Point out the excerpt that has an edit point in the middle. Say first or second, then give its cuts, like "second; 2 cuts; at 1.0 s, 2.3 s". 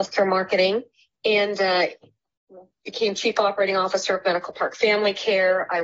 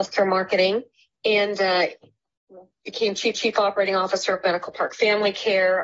second; 1 cut; at 3.3 s